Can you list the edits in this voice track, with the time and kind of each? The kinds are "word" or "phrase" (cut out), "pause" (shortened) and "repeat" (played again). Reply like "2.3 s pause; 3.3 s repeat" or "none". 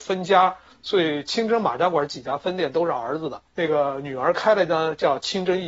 3.5 s pause